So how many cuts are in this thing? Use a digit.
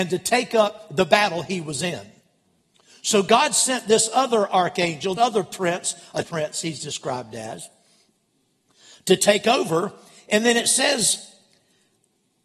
2